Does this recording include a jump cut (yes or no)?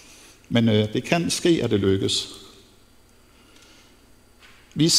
no